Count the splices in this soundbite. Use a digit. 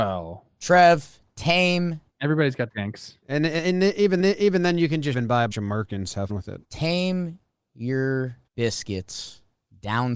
8